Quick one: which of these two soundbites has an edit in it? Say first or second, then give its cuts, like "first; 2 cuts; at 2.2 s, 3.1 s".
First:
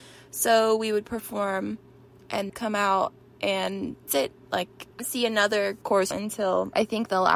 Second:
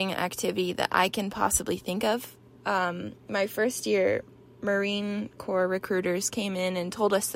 first; 5 cuts; at 1.0 s, 2.5 s, 4.1 s, 5.0 s, 6.1 s